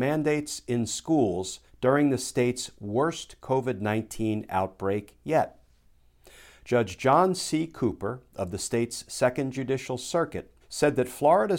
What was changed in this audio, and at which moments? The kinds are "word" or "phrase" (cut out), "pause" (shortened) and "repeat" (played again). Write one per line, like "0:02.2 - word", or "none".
0:01.7 - pause
0:10.6 - pause

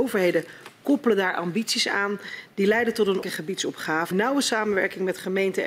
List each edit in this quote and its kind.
0:03.2 - word
0:04.1 - word

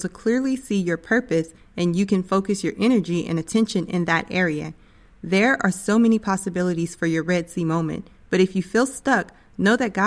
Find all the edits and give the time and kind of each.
none

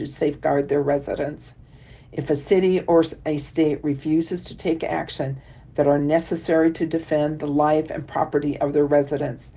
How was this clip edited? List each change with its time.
none

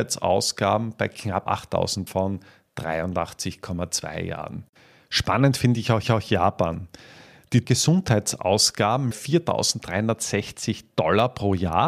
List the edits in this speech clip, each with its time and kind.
0:01.5 - word
0:02.1 - phrase
0:04.8 - pause
0:06.0 - repeat
0:07.6 - word
0:09.1 - phrase

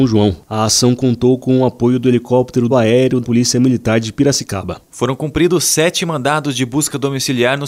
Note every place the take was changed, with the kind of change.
0:02.7 - phrase
0:03.2 - phrase

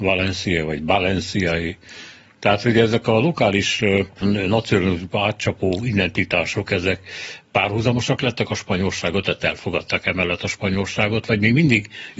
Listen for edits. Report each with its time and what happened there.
0:04.2 - phrase

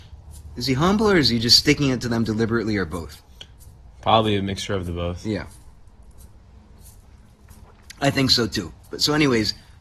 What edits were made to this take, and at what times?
none

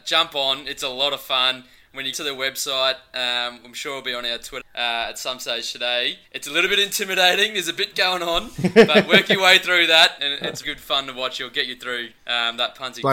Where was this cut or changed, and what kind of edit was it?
0:02.1 - word
0:04.6 - word
0:06.2 - pause
0:10.2 - word
0:10.6 - word
0:12.2 - pause

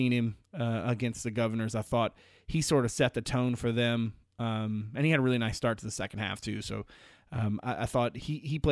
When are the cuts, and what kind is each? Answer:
none

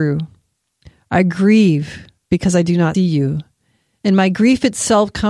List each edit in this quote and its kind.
0:02.9 - word

